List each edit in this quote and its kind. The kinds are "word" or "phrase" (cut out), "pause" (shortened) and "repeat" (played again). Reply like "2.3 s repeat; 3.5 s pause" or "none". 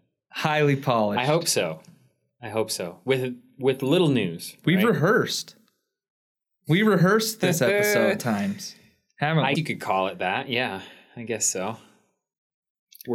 8.2 s word; 9.5 s word